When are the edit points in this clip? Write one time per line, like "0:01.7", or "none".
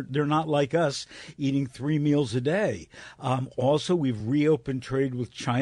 none